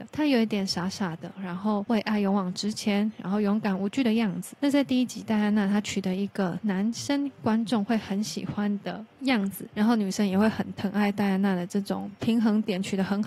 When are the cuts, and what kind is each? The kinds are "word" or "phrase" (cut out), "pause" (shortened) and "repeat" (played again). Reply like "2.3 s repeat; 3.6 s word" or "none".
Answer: none